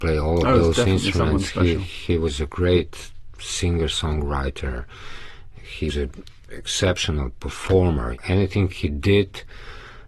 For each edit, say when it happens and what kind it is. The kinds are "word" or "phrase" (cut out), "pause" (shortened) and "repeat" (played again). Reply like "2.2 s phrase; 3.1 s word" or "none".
5.9 s word